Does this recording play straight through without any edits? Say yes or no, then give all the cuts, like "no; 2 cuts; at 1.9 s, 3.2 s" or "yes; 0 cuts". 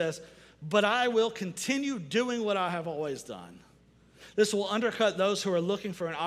yes; 0 cuts